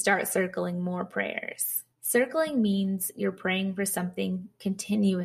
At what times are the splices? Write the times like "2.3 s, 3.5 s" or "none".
1.9 s